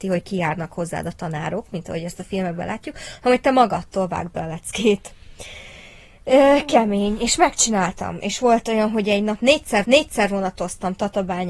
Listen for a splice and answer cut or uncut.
cut